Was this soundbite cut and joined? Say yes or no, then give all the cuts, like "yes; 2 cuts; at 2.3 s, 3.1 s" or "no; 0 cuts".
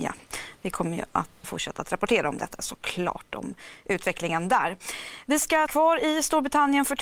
yes; 2 cuts; at 1.4 s, 5.7 s